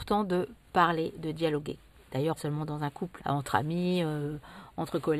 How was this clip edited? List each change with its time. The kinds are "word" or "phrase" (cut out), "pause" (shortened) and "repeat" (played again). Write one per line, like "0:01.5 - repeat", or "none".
0:02.4 - word
0:03.2 - word